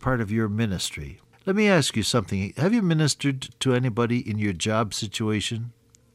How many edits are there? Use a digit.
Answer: 1